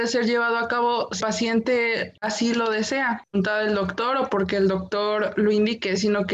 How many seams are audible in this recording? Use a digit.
1